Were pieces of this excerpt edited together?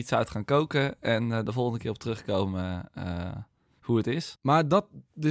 no; 0 cuts

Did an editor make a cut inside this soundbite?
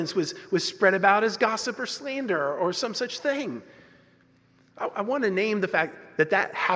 no; 0 cuts

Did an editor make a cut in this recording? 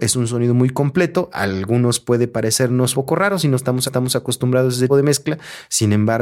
yes; 3 cuts; at 2.9 s, 3.9 s, 4.9 s

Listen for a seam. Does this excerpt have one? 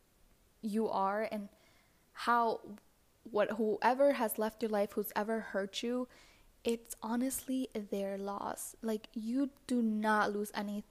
no; 0 cuts

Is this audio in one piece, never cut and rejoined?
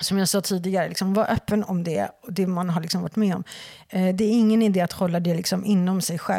yes; 0 cuts

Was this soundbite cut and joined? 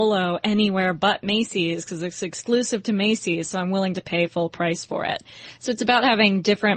no; 0 cuts

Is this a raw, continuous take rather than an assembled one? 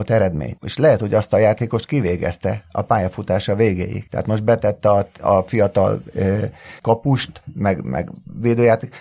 yes; 0 cuts

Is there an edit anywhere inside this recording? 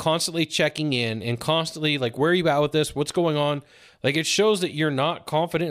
no; 0 cuts

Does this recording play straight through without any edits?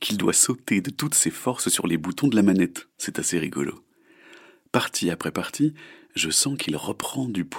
yes; 0 cuts

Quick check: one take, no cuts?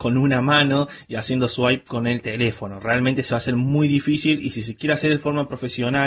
yes; 0 cuts

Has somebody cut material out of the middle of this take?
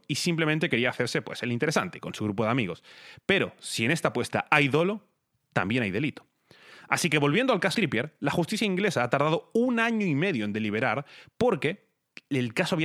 yes; 1 cut; at 7.7 s

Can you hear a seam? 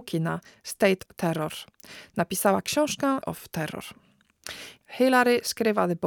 yes; 2 cuts; at 1.1 s, 3.2 s

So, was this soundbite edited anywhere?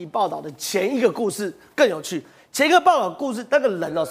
no; 0 cuts

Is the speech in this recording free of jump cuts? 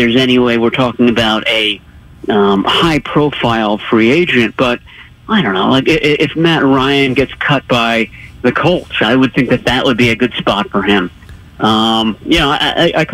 yes; 0 cuts

